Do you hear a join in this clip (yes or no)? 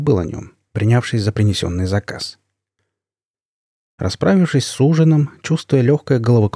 no